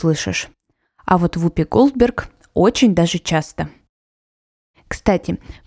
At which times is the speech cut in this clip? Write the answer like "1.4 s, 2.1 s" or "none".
none